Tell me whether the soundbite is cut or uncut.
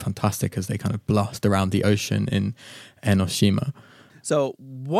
uncut